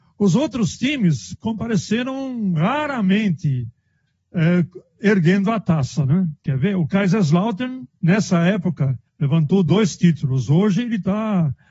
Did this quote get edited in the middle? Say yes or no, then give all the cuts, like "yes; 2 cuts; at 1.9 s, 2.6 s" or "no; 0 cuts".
yes; 2 cuts; at 8.0 s, 9.1 s